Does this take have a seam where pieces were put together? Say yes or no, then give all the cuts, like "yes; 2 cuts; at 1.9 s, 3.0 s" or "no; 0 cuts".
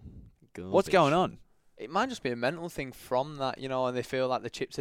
no; 0 cuts